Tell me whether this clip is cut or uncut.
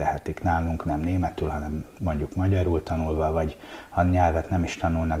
uncut